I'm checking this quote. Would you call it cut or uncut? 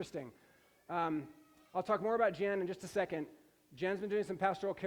uncut